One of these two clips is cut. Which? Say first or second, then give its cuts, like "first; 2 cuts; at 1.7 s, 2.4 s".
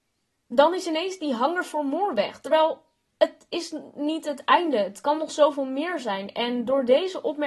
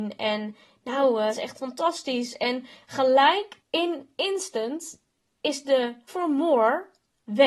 second; 3 cuts; at 1.3 s, 3.6 s, 6.1 s